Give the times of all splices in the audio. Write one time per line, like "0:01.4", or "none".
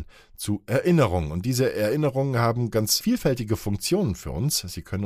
none